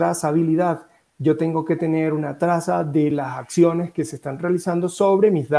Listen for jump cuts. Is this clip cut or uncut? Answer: uncut